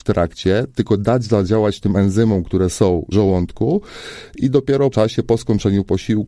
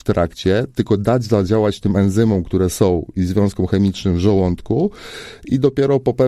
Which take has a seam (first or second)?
first